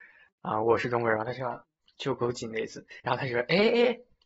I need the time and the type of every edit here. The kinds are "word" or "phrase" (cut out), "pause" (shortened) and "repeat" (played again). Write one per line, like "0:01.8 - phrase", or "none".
0:03.0 - pause